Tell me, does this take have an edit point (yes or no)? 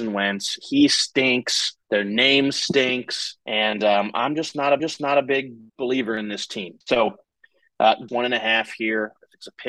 yes